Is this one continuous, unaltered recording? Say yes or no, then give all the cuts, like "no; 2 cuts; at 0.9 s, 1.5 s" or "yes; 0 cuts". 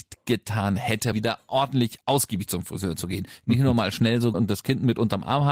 no; 2 cuts; at 1.1 s, 4.3 s